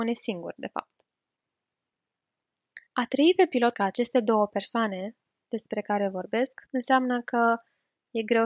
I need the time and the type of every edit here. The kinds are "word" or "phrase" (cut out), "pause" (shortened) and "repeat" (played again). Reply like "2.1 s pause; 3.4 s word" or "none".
2.9 s pause; 3.7 s word; 6.7 s pause